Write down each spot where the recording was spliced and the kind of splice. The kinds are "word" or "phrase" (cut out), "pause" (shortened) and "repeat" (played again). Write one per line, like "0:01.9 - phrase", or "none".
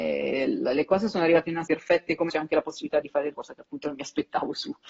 0:01.6 - word
0:02.3 - word
0:03.0 - word
0:03.3 - word